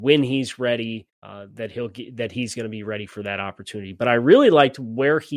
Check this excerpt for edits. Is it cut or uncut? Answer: cut